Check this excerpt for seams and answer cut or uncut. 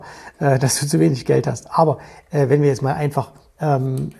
uncut